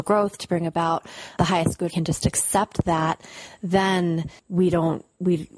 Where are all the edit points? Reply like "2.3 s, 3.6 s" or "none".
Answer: 1.9 s, 4.4 s